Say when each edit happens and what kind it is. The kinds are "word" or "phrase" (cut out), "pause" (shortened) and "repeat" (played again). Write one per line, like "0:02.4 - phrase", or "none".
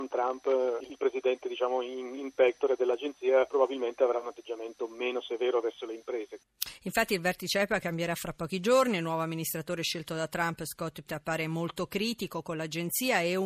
0:11.1 - word